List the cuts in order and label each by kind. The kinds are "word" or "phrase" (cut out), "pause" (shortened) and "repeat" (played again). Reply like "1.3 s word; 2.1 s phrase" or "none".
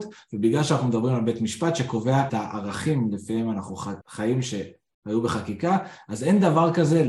2.3 s word; 4.0 s pause

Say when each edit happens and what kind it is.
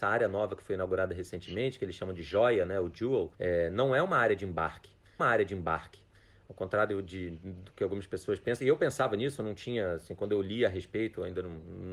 5.2 s repeat

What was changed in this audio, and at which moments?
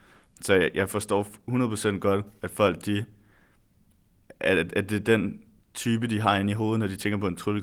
none

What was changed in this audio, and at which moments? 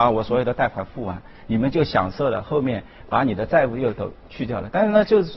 4.2 s pause

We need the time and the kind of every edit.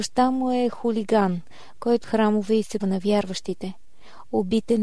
2.0 s word; 2.8 s word

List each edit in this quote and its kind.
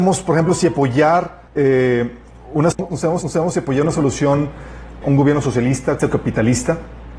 1.5 s pause; 2.7 s word; 3.2 s repeat; 5.0 s word; 6.0 s word

